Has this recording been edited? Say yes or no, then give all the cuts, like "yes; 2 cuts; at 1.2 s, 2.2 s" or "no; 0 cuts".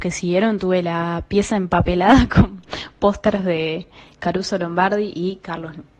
no; 0 cuts